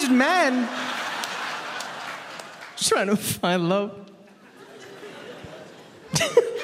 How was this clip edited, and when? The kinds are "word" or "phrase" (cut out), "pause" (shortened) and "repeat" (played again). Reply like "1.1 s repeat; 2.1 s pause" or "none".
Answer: 2.9 s word